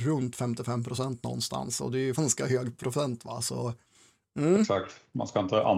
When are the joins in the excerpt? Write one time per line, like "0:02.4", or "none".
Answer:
0:02.2